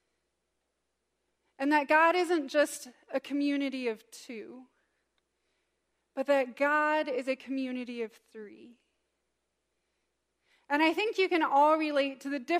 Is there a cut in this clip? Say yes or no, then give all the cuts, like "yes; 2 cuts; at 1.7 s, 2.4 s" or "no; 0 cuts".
no; 0 cuts